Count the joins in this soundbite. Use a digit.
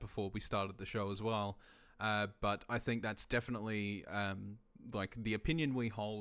0